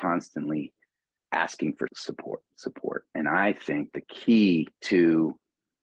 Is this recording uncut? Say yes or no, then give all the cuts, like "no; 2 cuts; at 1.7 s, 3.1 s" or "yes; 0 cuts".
no; 3 cuts; at 1.9 s, 3.9 s, 4.7 s